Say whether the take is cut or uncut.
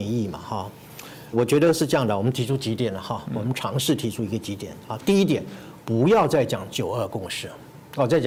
cut